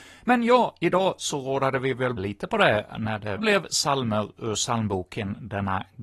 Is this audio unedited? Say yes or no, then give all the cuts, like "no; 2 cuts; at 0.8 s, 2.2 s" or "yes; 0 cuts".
no; 2 cuts; at 2.2 s, 3.4 s